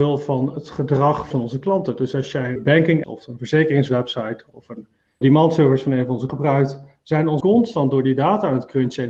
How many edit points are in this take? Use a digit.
6